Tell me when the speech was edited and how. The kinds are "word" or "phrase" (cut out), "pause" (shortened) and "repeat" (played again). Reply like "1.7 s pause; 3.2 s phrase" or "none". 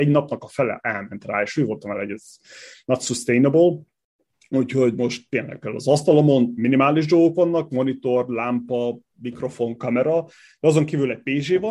none